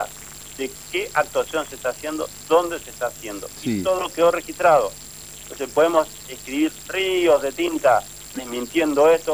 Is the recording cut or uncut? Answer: uncut